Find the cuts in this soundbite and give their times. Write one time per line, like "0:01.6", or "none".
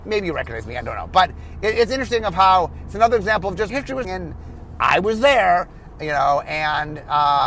0:03.7
0:04.0